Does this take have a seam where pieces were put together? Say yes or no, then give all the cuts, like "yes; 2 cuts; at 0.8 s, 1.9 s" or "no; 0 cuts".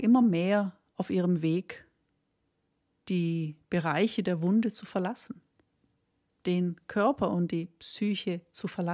no; 0 cuts